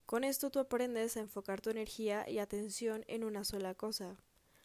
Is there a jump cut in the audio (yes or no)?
no